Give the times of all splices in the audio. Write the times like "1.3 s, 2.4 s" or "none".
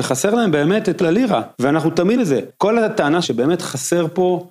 1.0 s, 1.5 s, 2.2 s, 2.5 s, 3.2 s